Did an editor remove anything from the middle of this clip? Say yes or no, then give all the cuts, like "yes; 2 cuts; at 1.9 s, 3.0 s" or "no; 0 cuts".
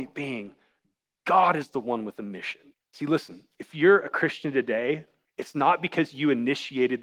yes; 2 cuts; at 2.7 s, 5.2 s